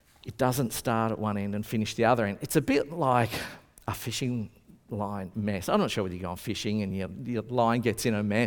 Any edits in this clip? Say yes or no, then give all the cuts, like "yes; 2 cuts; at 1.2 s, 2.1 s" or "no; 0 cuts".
no; 0 cuts